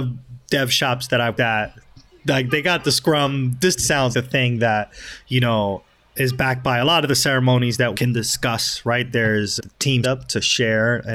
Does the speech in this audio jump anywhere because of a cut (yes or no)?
yes